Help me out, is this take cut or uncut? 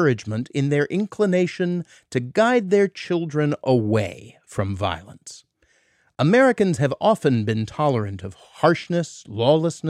uncut